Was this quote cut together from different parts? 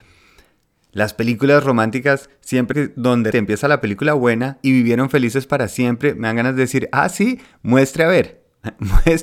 yes; 3 cuts; at 2.7 s, 3.3 s, 4.6 s

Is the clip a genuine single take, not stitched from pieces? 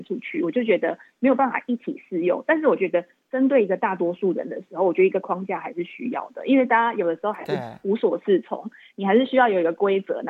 yes; 0 cuts

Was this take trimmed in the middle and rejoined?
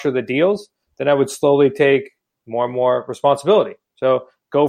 no; 0 cuts

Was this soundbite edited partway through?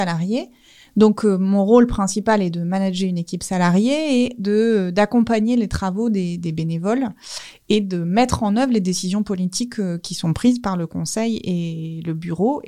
no; 0 cuts

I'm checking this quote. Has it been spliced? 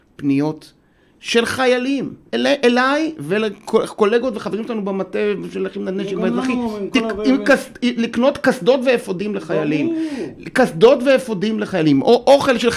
yes; 1 cut; at 2.3 s

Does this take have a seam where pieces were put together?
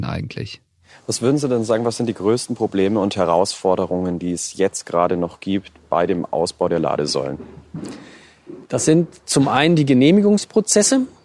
yes; 1 cut; at 8.6 s

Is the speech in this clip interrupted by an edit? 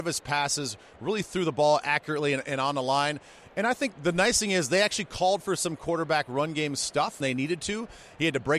yes; 1 cut; at 7.2 s

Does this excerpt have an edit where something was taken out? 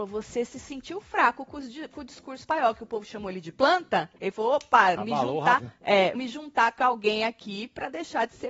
yes; 5 cuts; at 2.4 s, 4.2 s, 5.0 s, 5.6 s, 6.2 s

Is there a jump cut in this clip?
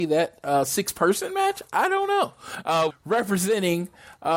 yes; 1 cut; at 2.9 s

